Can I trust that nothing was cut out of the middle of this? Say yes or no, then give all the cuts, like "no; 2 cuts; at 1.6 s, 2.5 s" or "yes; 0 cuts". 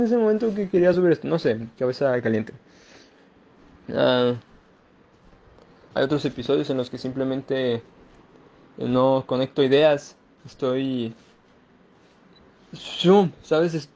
yes; 0 cuts